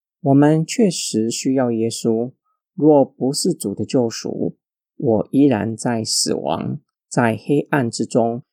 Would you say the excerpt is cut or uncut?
uncut